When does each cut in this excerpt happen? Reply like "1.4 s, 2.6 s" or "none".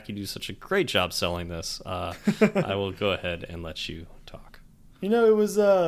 none